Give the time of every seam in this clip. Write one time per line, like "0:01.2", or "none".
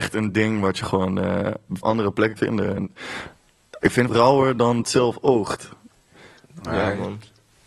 0:01.8
0:02.4
0:04.1
0:04.8